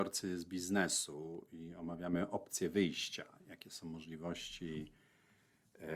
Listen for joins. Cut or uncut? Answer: uncut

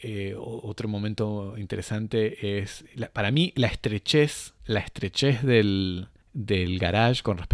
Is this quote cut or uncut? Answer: cut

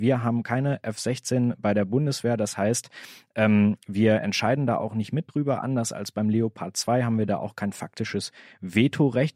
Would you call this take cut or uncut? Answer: uncut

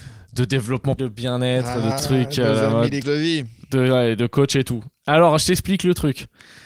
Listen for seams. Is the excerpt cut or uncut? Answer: cut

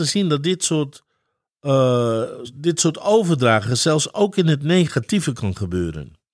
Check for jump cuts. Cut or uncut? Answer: uncut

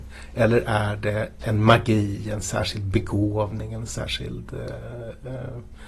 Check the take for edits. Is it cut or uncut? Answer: uncut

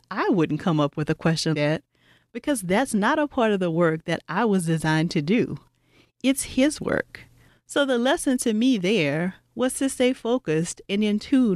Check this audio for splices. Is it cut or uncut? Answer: cut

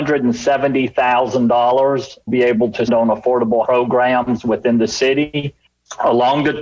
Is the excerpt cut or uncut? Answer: cut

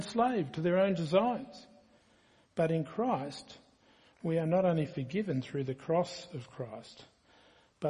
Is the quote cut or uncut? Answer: uncut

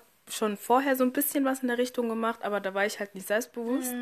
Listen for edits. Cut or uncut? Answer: uncut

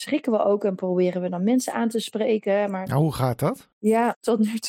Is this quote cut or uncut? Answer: uncut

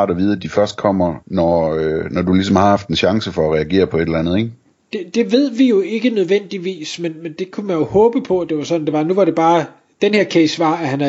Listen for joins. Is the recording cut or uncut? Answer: cut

